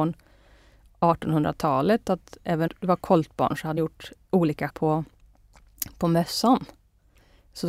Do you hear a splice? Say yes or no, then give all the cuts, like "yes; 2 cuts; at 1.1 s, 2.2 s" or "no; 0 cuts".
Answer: yes; 3 cuts; at 2.7 s, 3.8 s, 4.7 s